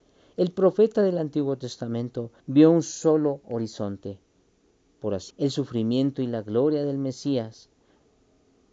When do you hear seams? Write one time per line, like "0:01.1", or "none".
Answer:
0:02.4
0:05.3